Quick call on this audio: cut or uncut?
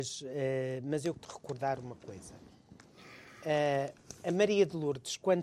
cut